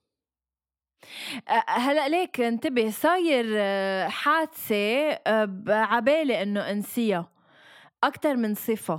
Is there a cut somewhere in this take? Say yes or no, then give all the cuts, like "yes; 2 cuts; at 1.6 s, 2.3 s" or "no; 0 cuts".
no; 0 cuts